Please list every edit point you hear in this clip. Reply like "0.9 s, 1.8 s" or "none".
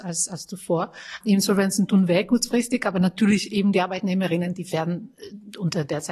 none